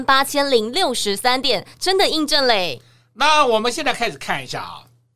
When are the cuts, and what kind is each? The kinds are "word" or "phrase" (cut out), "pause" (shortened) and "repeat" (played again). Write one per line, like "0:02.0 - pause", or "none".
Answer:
none

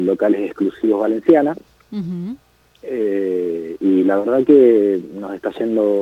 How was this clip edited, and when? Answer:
none

